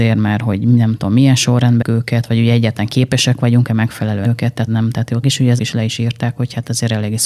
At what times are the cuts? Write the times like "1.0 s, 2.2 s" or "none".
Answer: 1.8 s, 4.2 s, 4.7 s, 5.2 s, 5.6 s